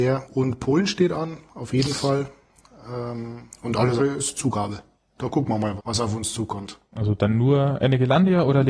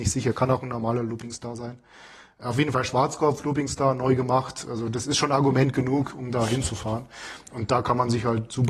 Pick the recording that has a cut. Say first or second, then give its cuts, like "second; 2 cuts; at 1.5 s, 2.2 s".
first; 2 cuts; at 4.0 s, 5.8 s